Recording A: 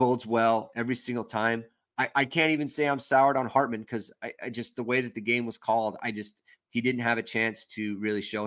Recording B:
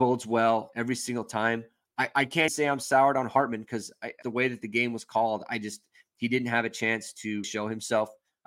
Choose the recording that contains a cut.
B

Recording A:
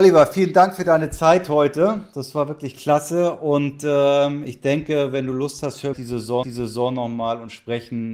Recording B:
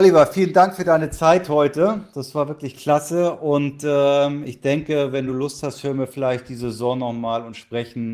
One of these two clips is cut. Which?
A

